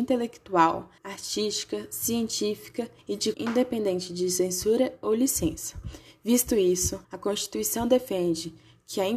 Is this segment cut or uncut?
cut